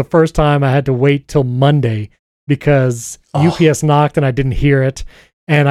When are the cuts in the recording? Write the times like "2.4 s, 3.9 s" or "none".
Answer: none

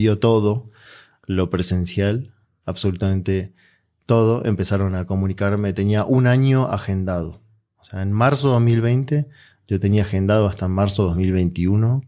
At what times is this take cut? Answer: none

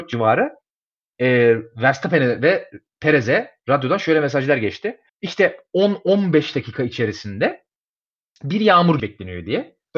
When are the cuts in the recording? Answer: 5.1 s, 9.0 s

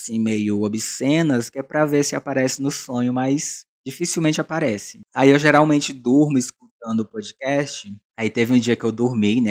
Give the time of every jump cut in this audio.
3.7 s

